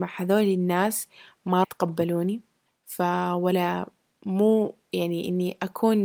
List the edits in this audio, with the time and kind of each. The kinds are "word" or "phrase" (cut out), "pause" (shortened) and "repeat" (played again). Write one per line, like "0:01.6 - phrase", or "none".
0:01.6 - word
0:02.7 - pause